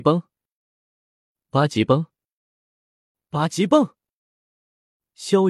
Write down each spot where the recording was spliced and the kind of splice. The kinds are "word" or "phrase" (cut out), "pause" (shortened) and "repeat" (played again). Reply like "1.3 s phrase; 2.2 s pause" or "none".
none